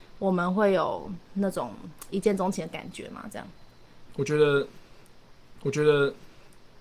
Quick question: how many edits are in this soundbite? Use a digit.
1